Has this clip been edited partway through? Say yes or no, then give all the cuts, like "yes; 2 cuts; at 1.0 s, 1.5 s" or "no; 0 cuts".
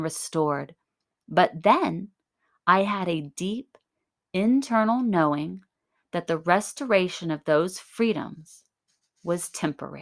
no; 0 cuts